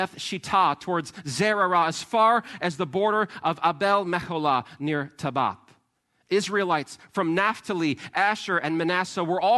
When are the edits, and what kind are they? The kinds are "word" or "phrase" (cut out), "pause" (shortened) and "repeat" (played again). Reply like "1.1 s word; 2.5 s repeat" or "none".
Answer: none